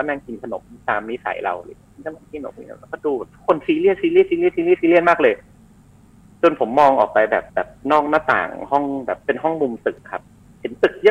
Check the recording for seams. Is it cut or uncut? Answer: cut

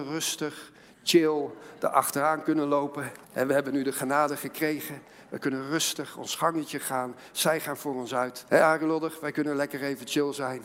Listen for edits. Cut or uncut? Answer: cut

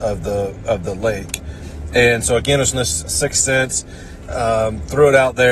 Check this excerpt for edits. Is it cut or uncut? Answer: cut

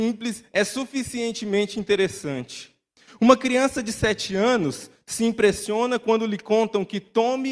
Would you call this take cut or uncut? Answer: uncut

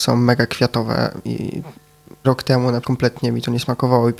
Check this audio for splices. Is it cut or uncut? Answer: cut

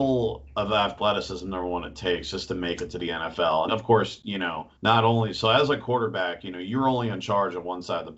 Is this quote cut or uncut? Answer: cut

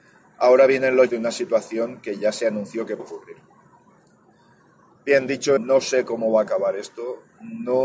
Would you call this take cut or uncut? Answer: cut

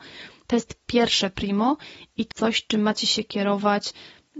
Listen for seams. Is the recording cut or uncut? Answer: cut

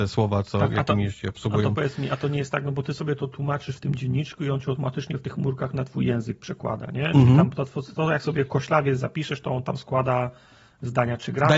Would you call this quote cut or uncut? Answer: uncut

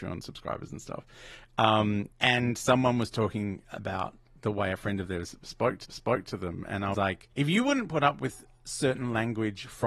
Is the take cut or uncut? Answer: cut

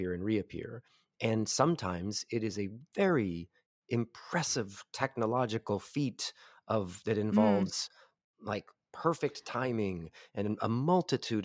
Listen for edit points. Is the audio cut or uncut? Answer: uncut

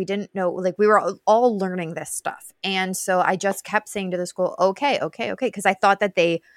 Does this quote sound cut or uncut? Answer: uncut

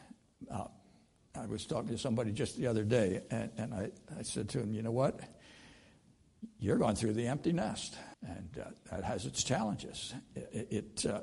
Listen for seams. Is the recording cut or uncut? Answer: cut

